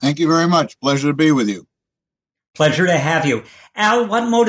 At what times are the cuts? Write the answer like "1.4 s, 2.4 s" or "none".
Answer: none